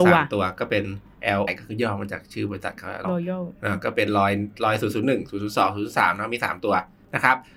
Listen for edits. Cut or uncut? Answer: cut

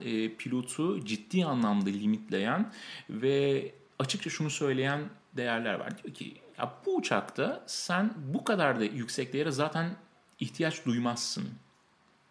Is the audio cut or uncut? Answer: uncut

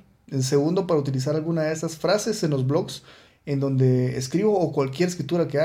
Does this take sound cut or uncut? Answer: uncut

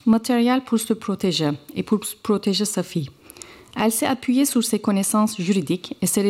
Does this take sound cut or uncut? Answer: uncut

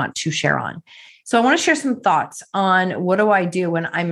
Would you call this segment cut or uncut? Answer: uncut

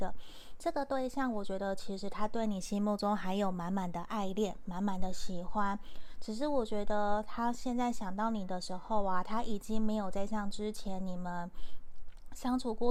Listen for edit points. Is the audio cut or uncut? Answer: uncut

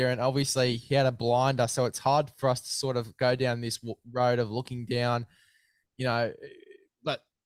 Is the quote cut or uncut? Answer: uncut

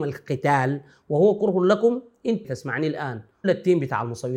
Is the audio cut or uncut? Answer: cut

